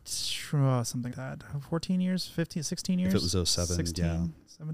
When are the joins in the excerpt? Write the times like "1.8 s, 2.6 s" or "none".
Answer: 1.1 s